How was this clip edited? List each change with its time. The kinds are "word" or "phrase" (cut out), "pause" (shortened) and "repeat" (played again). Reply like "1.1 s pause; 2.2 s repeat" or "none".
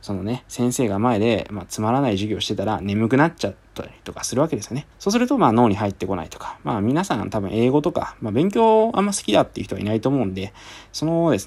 4.9 s pause